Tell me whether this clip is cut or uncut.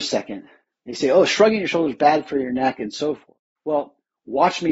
cut